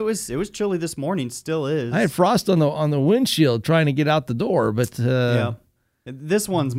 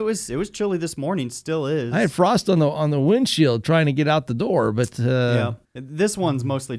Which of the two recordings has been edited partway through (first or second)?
second